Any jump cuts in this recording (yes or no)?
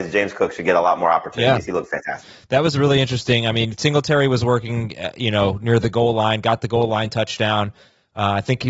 no